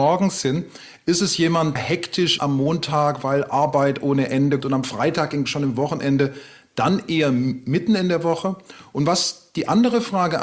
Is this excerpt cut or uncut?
cut